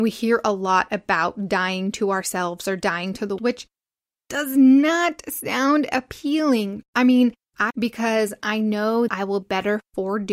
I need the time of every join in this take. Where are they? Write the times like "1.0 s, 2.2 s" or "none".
3.4 s, 7.7 s, 9.1 s, 9.4 s